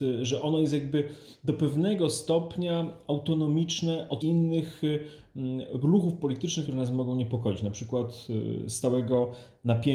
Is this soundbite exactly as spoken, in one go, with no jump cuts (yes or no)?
no